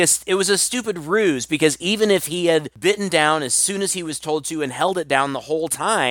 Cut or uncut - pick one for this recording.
uncut